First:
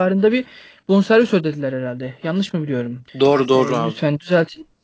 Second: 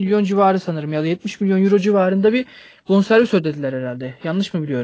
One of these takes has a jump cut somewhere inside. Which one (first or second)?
first